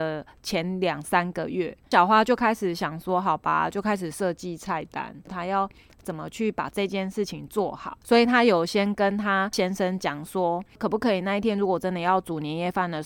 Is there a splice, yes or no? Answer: no